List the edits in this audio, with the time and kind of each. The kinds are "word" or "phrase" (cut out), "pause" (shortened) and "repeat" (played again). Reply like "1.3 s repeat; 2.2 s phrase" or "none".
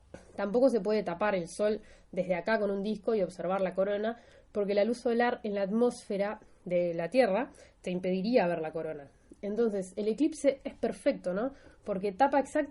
none

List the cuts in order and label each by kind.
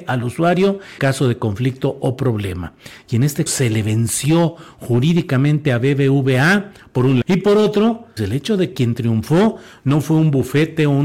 1.0 s word; 3.5 s word; 7.2 s word; 8.2 s word; 8.7 s word

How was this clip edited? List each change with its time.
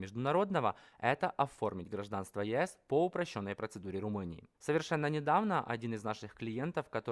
4.5 s pause

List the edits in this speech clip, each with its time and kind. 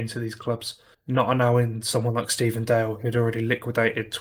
0.9 s pause

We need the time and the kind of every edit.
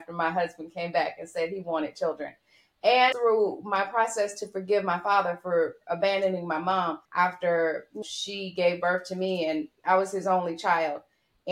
3.1 s phrase; 7.0 s pause; 8.0 s word; 9.7 s pause

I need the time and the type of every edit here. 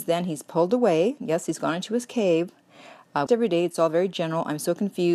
3.3 s phrase

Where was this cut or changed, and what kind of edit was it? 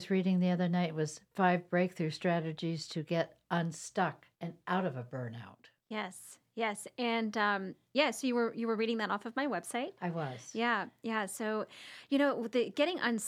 4.3 s pause; 5.8 s pause

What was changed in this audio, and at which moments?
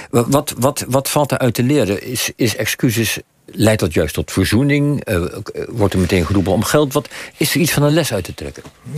none

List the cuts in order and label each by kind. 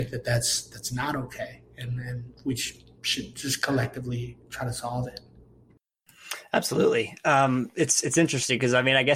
none

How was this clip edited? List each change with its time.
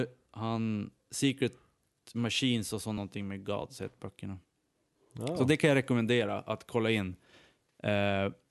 none

